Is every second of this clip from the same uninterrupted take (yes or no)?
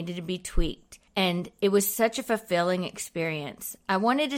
no